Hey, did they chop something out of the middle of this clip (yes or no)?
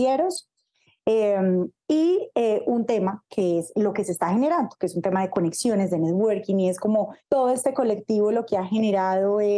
yes